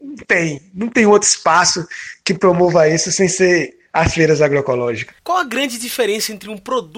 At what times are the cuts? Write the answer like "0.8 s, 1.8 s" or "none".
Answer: 5.2 s